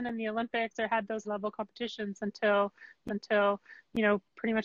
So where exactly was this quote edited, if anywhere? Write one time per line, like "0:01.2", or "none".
0:01.2
0:03.1